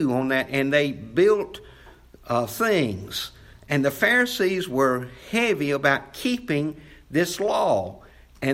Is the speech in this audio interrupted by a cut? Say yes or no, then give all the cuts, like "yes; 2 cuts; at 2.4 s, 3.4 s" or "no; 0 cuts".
no; 0 cuts